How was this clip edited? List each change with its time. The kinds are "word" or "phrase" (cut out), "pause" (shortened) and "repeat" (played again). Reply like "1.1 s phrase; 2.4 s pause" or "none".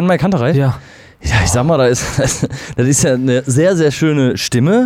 none